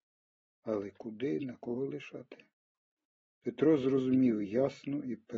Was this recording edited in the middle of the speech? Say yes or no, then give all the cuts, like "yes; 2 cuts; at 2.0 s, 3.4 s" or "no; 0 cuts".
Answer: no; 0 cuts